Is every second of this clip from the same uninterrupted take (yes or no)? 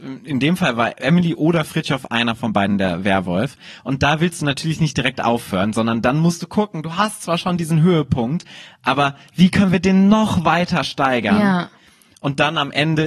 yes